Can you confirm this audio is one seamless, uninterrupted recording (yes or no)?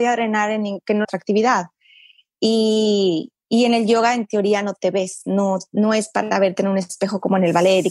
no